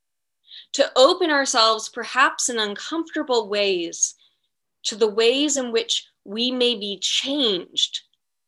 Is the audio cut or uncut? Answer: uncut